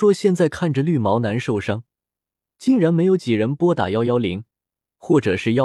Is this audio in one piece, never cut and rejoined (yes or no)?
yes